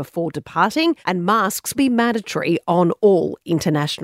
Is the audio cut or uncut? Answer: cut